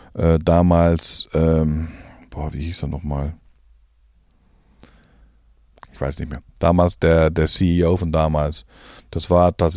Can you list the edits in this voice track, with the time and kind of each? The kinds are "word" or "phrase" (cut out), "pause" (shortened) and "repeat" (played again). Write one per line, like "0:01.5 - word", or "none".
none